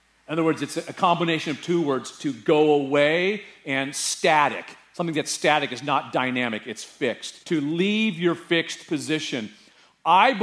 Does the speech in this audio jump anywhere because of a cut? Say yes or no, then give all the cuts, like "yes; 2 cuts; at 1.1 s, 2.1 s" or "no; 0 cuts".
yes; 1 cut; at 7.4 s